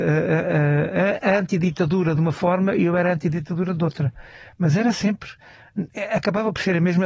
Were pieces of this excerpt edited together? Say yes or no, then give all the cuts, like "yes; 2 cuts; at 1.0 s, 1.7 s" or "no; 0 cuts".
no; 0 cuts